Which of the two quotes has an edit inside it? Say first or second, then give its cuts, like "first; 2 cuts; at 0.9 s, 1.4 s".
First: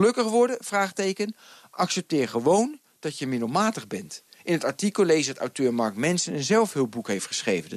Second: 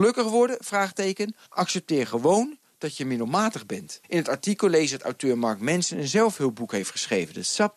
second; 2 cuts; at 1.4 s, 4.0 s